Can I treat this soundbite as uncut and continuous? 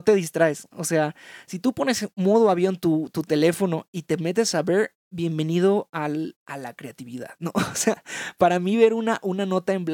no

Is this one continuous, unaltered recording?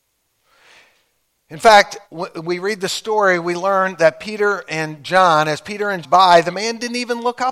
no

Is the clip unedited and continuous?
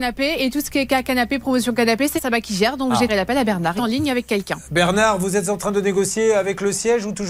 no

